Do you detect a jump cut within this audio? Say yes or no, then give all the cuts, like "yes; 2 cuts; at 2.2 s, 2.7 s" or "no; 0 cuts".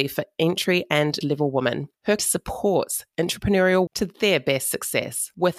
yes; 3 cuts; at 1.2 s, 2.2 s, 3.9 s